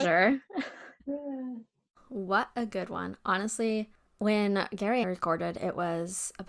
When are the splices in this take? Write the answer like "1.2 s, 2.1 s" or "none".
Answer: 1.0 s, 5.0 s